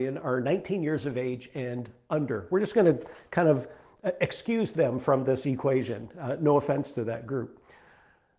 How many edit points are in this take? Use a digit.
0